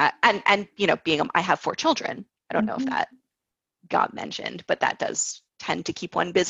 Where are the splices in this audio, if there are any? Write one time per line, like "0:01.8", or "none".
none